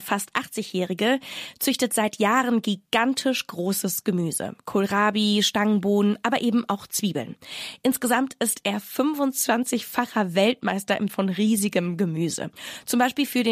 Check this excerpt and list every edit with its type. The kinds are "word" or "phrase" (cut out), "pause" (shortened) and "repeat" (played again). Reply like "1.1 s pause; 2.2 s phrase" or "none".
11.1 s word